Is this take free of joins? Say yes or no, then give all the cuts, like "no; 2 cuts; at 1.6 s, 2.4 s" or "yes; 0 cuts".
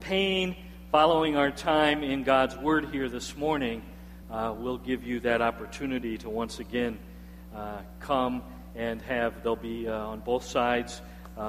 yes; 0 cuts